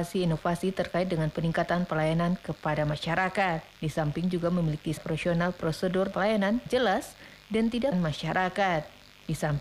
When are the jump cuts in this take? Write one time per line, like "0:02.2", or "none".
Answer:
0:03.7
0:05.0
0:06.1
0:06.7
0:07.9